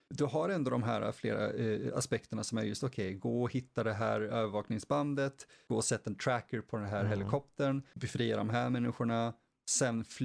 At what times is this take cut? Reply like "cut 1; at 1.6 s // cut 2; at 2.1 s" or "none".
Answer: none